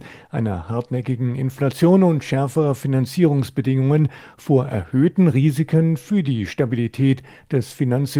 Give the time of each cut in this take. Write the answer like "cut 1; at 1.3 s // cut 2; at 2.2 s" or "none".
none